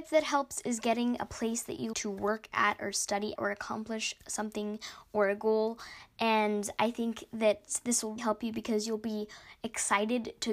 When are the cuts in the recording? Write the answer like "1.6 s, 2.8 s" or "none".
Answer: 1.9 s, 3.4 s, 8.2 s